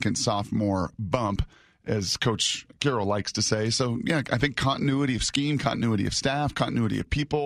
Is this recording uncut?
yes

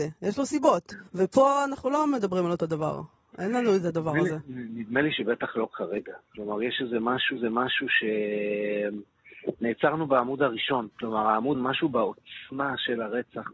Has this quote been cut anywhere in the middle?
yes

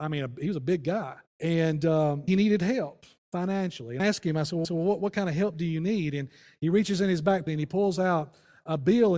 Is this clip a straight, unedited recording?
no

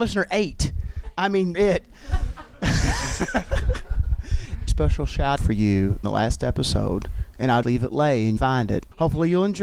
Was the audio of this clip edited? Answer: yes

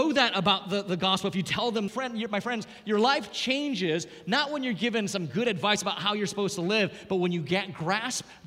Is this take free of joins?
no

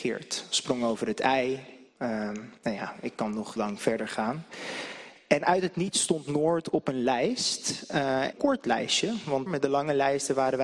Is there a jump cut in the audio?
yes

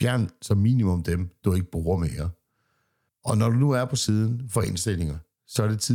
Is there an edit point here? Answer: no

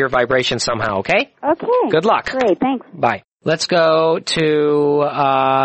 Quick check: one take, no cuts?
no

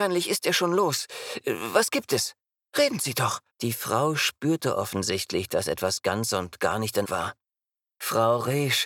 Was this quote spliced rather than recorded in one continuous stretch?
yes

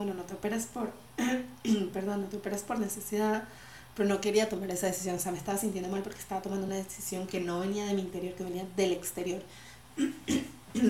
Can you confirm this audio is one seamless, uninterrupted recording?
yes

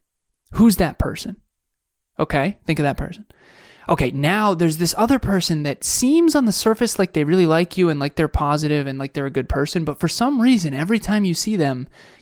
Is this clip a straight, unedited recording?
yes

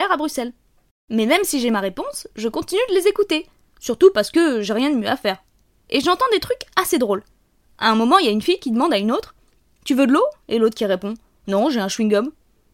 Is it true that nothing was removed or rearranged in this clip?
yes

